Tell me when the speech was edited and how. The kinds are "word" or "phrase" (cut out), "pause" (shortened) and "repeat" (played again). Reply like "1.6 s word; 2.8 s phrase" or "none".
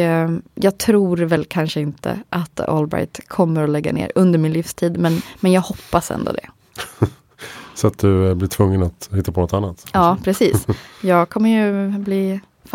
none